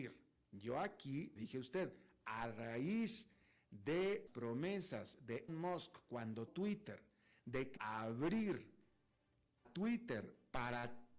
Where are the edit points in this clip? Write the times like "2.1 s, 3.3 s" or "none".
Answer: 1.4 s, 4.3 s, 5.5 s, 6.5 s, 7.8 s, 9.6 s